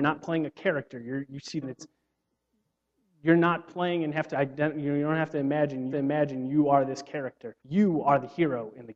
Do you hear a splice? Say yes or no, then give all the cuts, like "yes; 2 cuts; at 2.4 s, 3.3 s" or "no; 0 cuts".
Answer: yes; 4 cuts; at 1.6 s, 4.3 s, 5.9 s, 7.6 s